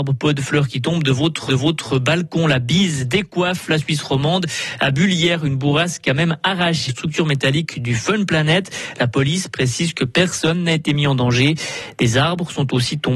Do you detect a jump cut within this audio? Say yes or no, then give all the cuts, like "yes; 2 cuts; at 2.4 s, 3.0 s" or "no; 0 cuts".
yes; 2 cuts; at 1.5 s, 6.9 s